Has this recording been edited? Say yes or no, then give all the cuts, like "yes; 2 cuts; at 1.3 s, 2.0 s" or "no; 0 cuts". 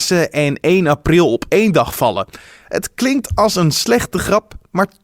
no; 0 cuts